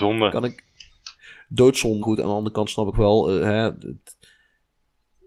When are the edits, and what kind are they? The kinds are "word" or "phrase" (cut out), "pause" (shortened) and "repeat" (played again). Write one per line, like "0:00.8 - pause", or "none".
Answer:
0:02.0 - word
0:02.9 - phrase